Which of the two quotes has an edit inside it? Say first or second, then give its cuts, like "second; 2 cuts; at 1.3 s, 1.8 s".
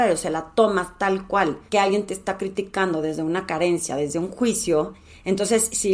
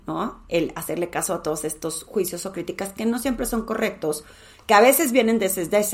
first; 1 cut; at 1.7 s